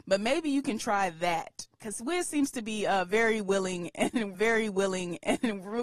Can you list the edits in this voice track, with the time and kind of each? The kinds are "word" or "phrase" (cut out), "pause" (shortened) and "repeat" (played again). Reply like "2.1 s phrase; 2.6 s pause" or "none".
4.3 s repeat